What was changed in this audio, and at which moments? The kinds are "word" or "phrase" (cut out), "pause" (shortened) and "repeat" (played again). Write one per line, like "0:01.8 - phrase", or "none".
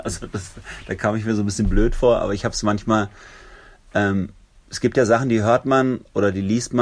none